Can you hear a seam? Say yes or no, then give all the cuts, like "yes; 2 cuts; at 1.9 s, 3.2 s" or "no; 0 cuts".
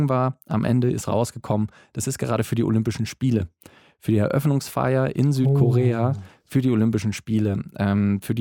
no; 0 cuts